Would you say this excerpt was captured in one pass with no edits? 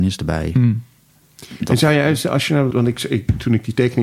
no; 1 cut; at 2.7 s

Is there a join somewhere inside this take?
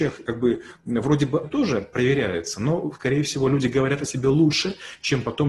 yes; 1 cut; at 1.4 s

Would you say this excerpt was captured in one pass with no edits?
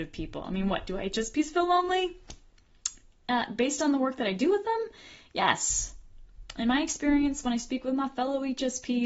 yes; 0 cuts

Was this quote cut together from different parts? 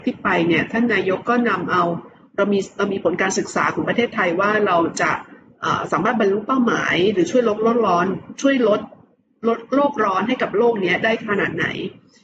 no; 0 cuts

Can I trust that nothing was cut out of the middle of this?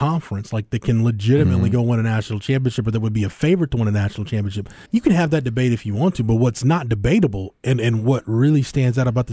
no; 1 cut; at 4.9 s

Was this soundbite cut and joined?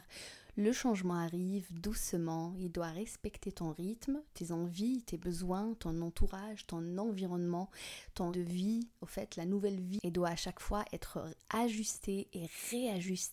yes; 1 cut; at 8.3 s

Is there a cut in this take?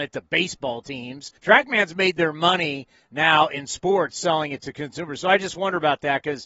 yes; 1 cut; at 1.4 s

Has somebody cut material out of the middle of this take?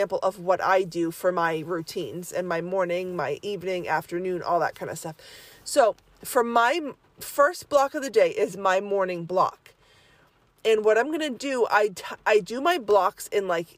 no; 0 cuts

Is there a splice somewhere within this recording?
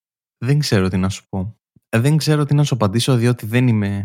no; 0 cuts

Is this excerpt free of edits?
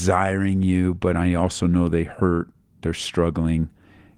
yes; 0 cuts

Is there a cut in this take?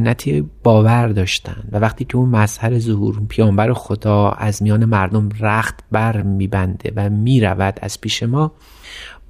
no; 0 cuts

